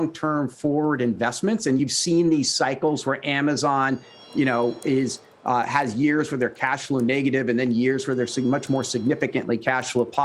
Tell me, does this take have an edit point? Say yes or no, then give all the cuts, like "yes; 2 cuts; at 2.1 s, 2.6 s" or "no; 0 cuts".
no; 0 cuts